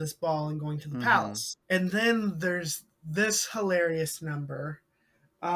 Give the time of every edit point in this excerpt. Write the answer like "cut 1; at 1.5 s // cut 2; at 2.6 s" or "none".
cut 1; at 1.6 s